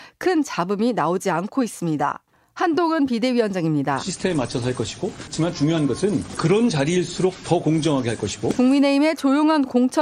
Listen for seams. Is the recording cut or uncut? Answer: uncut